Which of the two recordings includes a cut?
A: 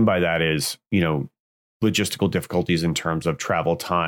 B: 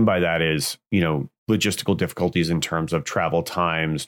B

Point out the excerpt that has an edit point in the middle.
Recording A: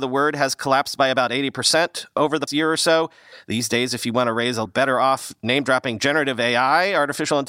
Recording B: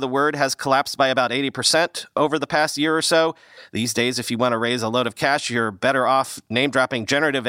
A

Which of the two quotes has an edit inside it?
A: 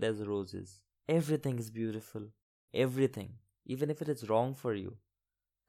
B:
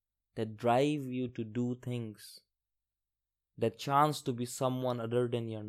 A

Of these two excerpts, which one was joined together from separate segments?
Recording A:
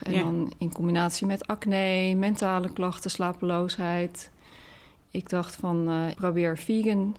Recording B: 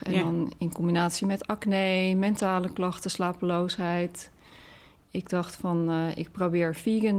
A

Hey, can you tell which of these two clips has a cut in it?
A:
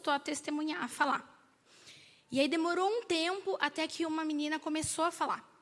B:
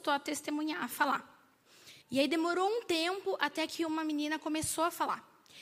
B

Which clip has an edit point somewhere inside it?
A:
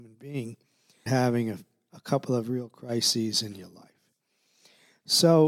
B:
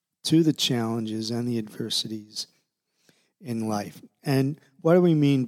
A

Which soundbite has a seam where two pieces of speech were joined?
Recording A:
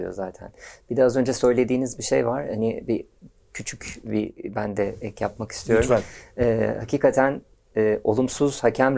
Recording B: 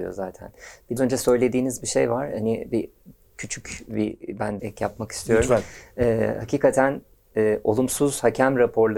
B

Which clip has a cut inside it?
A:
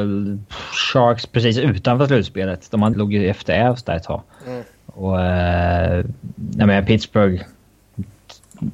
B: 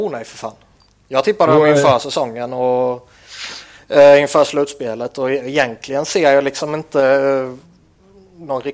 A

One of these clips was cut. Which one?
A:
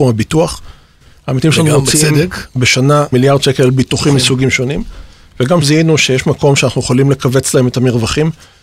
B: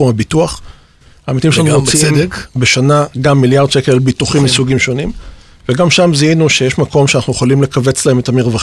A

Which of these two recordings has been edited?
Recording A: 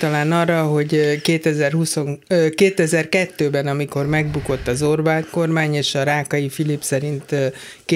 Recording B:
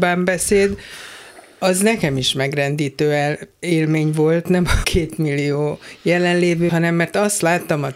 B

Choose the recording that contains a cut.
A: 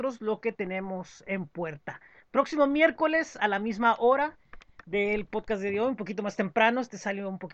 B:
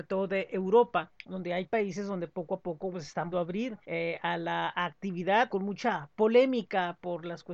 B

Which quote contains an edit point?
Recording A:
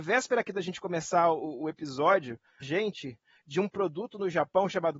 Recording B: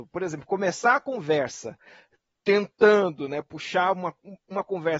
A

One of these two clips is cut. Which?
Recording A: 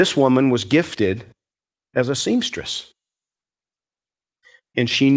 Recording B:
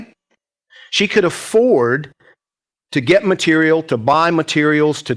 A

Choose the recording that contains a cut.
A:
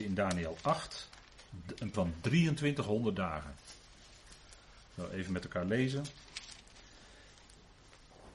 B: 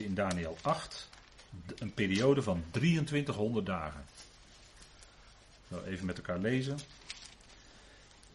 A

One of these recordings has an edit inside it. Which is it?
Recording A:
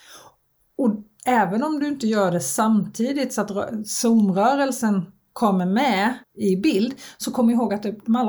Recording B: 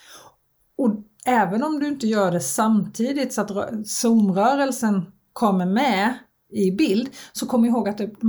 A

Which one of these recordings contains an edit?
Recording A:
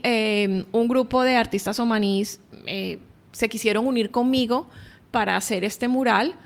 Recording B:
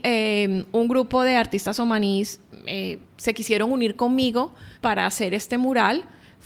B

